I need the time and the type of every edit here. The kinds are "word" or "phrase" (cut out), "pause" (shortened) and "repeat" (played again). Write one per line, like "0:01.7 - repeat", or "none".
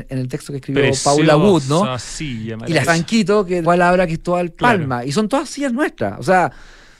0:02.9 - word
0:03.6 - word